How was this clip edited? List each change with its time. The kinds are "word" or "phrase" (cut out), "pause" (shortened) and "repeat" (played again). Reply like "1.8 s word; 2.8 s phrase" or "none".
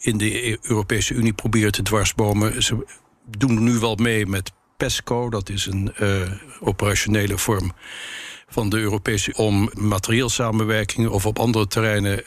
9.3 s word; 9.7 s word

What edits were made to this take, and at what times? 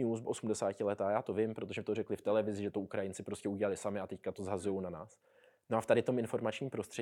none

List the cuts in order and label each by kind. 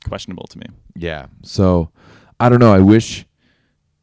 none

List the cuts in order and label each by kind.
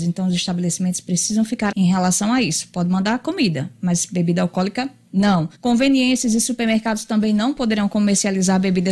1.7 s word; 5.5 s pause

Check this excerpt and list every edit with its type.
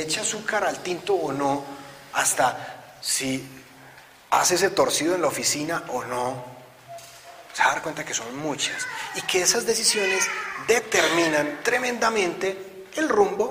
none

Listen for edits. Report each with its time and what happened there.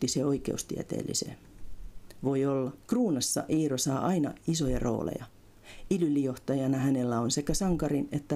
2.8 s pause

